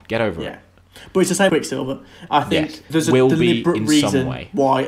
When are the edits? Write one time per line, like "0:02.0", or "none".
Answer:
0:01.5
0:02.9